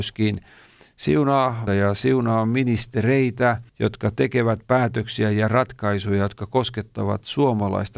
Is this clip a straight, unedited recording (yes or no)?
no